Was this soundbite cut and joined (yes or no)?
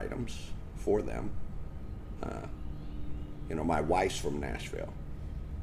no